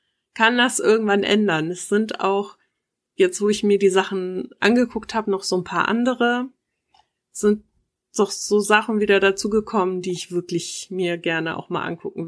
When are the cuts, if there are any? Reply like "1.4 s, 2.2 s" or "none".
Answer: none